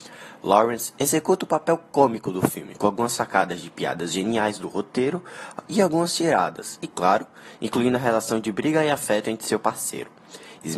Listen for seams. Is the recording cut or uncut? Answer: uncut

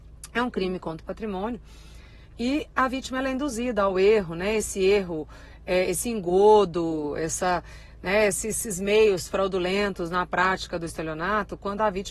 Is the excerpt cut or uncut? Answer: uncut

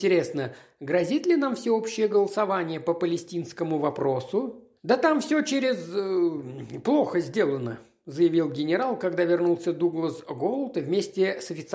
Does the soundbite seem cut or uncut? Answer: cut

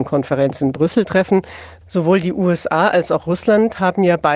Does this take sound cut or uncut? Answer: uncut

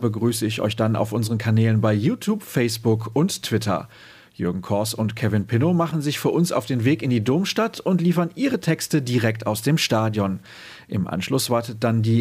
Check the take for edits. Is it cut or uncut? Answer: uncut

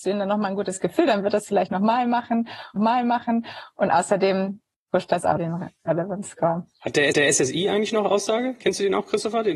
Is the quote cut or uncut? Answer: cut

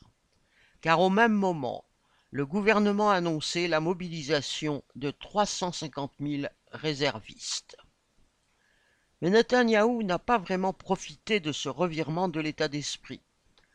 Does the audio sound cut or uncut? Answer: uncut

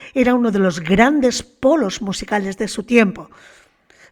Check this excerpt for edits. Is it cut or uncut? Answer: uncut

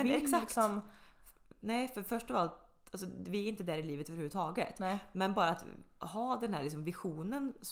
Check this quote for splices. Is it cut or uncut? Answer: uncut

